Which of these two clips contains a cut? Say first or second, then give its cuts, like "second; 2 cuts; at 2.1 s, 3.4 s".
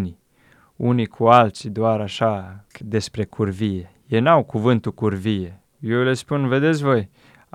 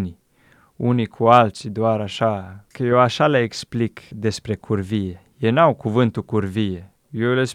first; 1 cut; at 2.8 s